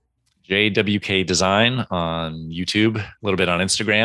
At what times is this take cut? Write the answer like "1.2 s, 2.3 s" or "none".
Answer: 3.1 s